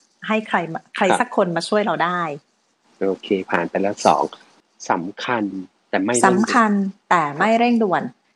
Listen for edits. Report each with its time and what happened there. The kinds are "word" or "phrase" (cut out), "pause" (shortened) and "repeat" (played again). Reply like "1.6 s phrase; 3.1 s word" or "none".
none